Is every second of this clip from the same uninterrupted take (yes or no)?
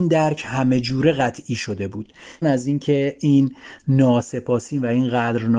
no